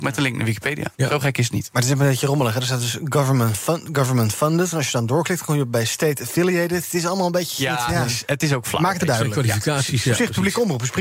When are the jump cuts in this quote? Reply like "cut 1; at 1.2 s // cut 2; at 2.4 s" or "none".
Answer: cut 1; at 0.9 s // cut 2; at 9.0 s